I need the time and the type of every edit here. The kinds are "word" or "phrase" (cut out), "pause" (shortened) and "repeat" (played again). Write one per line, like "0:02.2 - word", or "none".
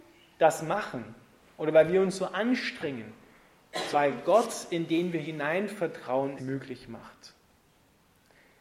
0:03.9 - word
0:06.4 - word

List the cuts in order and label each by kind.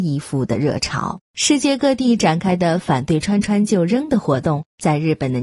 0:01.2 - pause

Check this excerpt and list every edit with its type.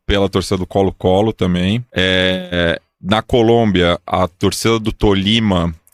0:01.9 - pause

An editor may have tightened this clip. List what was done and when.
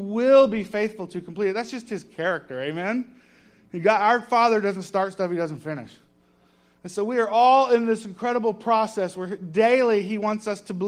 none

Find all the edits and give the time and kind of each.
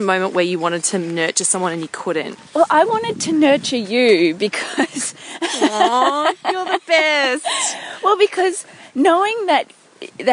0:02.5 - pause

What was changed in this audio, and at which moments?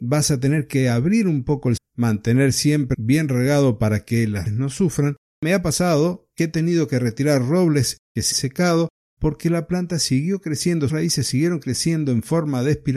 0:01.8 - word
0:02.9 - word
0:04.5 - word
0:05.3 - word
0:08.3 - word
0:10.9 - word

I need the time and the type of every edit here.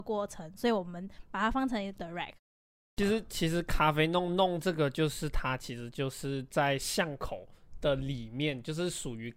0:02.0 - word

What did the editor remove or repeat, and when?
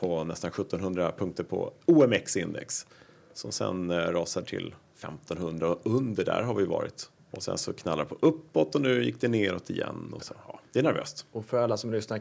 0:01.8 - pause
0:04.4 - word
0:07.2 - pause
0:10.2 - word

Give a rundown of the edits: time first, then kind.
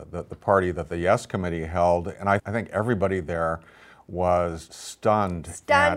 0:02.4 - word
0:04.7 - word

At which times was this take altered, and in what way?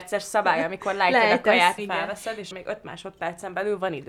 0:01.8 - phrase
0:02.5 - word

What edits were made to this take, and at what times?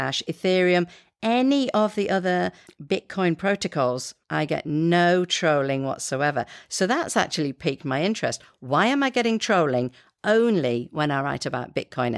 0:02.7 - word
0:04.2 - pause

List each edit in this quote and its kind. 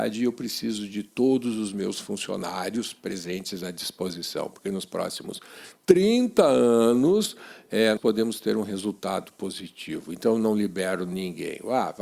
0:05.8 - pause
0:08.0 - word

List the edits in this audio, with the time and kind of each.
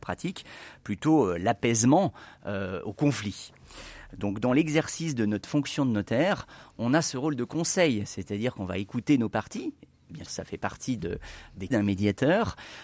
0:10.3 - word
0:11.0 - word
0:11.7 - word

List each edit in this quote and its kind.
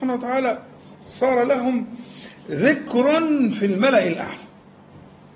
none

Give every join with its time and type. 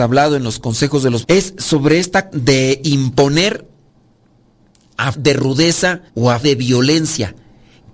0:01.2 - word
0:02.3 - word
0:05.1 - word
0:06.1 - pause
0:06.4 - word

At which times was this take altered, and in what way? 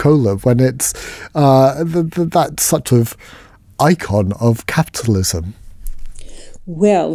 0:02.9 - phrase

